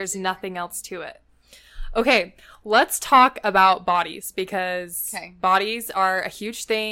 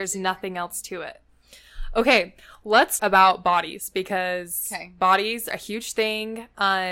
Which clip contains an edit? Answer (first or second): second